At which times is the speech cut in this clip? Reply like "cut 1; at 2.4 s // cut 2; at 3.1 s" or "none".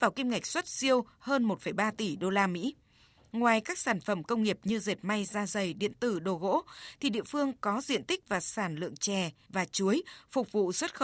none